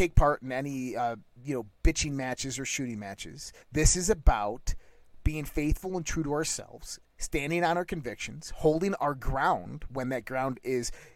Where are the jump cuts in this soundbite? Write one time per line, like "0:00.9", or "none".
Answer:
0:03.6